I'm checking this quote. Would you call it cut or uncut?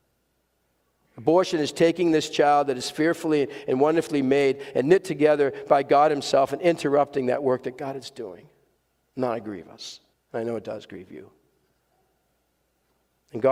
cut